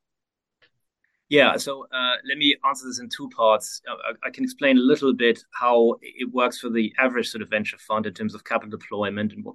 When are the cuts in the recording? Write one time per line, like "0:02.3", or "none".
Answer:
none